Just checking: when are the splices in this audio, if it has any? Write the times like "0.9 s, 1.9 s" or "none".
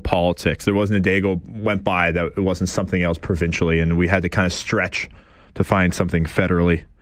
none

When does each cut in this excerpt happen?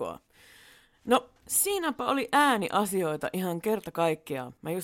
none

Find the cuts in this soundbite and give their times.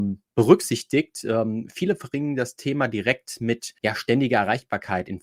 3.8 s

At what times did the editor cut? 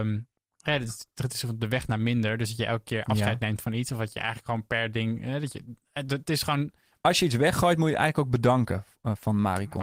none

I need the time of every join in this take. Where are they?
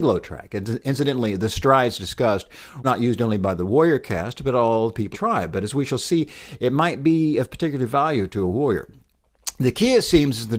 2.8 s, 5.1 s

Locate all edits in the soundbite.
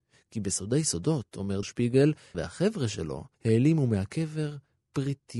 1.6 s, 2.3 s, 3.3 s

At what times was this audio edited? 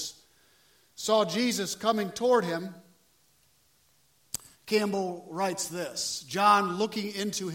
4.5 s

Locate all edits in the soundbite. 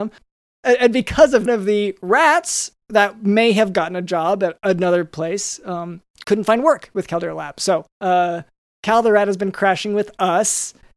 1.5 s, 2.8 s, 6.2 s, 7.9 s

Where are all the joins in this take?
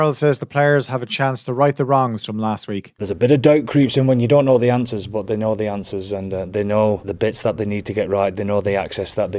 none

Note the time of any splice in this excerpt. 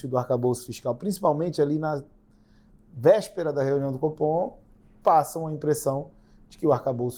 none

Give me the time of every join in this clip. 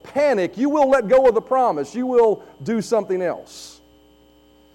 none

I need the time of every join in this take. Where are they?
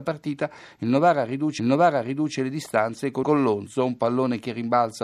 1.6 s, 3.2 s

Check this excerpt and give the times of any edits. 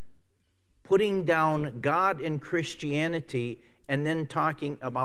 none

